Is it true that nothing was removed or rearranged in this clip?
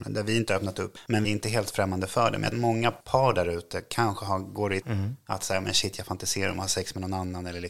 no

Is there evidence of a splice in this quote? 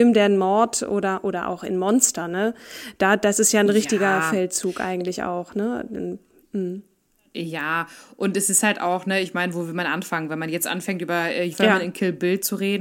yes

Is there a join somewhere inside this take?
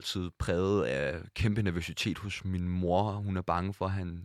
no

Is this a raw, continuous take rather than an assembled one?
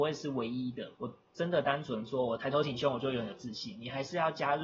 no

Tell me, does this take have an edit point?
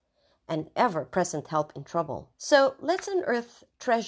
yes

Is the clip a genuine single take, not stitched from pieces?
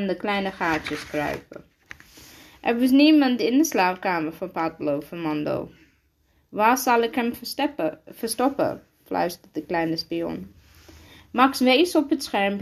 yes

